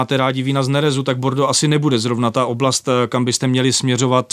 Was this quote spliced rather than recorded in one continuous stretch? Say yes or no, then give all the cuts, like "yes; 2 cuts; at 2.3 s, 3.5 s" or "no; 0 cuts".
no; 0 cuts